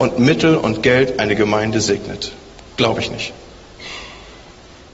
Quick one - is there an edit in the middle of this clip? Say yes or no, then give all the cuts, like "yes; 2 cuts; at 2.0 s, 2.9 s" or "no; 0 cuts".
no; 0 cuts